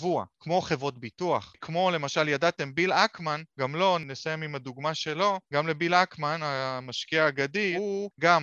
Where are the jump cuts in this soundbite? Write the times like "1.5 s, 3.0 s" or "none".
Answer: 3.5 s